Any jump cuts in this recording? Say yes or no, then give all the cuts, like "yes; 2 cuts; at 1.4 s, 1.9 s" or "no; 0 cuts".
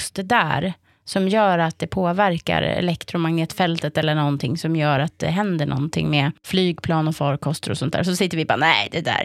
no; 0 cuts